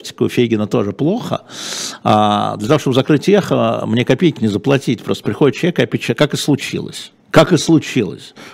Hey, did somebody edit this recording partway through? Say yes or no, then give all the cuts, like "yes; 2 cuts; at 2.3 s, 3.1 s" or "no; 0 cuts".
yes; 2 cuts; at 4.4 s, 7.2 s